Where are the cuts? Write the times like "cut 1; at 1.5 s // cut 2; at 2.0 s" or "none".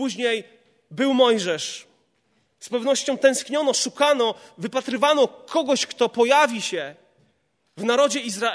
none